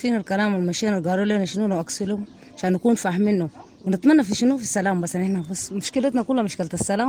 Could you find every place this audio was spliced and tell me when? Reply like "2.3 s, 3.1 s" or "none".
none